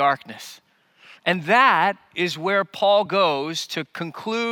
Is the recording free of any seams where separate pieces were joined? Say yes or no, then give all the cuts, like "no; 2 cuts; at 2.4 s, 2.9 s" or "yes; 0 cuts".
yes; 0 cuts